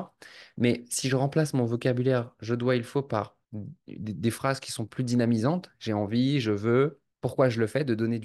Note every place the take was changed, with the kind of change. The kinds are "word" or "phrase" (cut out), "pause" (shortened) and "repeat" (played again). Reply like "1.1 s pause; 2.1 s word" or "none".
3.4 s pause; 7.1 s pause